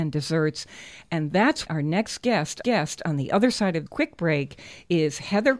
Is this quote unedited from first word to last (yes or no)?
no